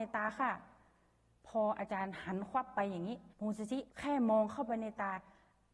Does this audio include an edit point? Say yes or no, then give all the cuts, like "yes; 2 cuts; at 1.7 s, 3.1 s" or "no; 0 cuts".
yes; 2 cuts; at 3.3 s, 3.9 s